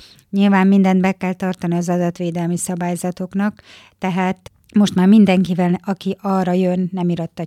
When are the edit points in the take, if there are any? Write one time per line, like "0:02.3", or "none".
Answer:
none